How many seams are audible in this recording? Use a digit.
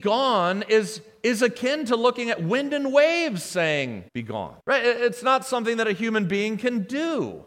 3